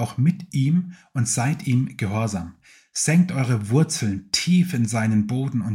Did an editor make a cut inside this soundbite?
no; 0 cuts

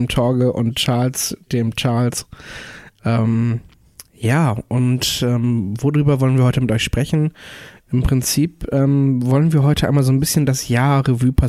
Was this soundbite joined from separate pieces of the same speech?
no; 0 cuts

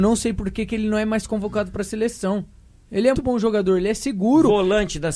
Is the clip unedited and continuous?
no; 1 cut; at 3.1 s

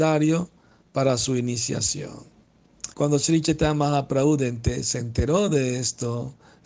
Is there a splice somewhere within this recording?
yes; 1 cut; at 2.9 s

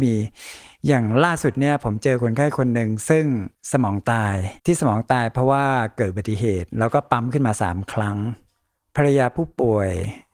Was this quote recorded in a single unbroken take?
no; 3 cuts; at 3.5 s, 4.6 s, 8.8 s

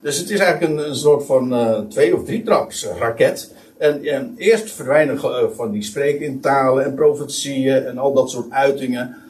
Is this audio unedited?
yes; 0 cuts

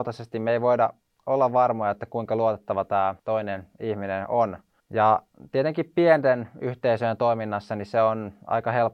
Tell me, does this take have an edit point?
yes; 2 cuts; at 3.2 s, 4.8 s

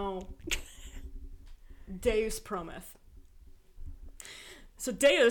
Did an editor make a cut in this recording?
no; 0 cuts

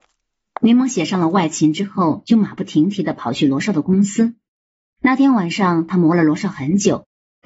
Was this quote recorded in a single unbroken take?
yes; 0 cuts

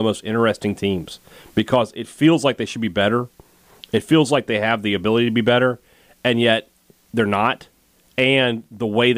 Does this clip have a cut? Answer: no; 0 cuts

